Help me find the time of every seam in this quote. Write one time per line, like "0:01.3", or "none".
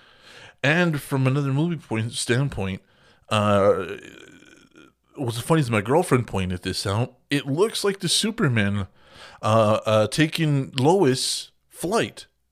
none